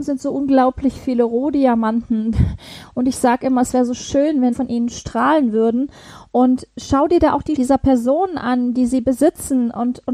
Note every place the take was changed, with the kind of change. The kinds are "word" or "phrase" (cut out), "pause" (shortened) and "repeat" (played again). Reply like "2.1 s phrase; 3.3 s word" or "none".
4.5 s phrase; 7.6 s word